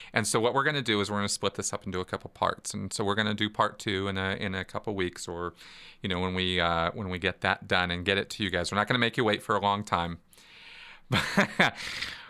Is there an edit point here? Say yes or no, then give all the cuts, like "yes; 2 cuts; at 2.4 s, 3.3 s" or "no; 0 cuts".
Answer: no; 0 cuts